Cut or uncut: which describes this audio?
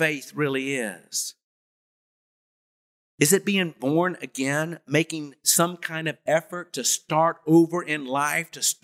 uncut